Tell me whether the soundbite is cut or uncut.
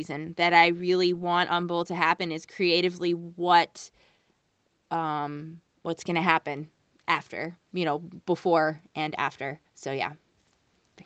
cut